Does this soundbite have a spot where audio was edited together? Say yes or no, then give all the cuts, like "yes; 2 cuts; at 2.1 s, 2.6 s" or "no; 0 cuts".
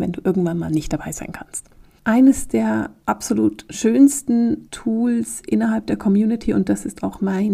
no; 0 cuts